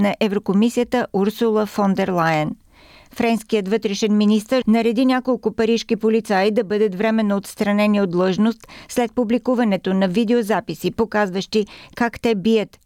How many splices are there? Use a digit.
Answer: 1